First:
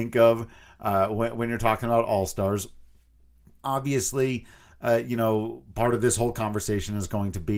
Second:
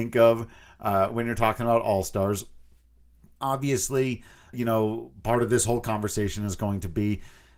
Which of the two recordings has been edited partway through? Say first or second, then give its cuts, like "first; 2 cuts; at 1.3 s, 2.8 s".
second; 2 cuts; at 1.1 s, 4.5 s